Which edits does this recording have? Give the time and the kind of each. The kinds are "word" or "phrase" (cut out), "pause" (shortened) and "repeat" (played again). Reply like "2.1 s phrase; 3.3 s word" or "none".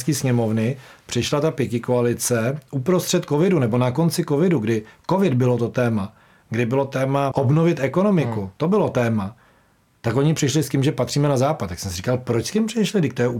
7.3 s word